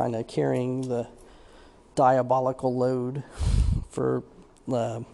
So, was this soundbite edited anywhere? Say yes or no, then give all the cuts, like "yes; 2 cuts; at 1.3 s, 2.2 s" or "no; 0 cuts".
no; 0 cuts